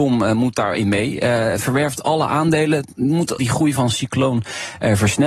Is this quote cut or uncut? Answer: cut